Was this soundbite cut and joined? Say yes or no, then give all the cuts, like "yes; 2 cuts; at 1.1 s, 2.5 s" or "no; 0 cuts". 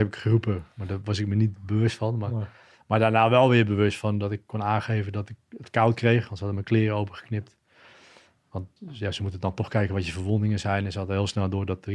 yes; 1 cut; at 8.8 s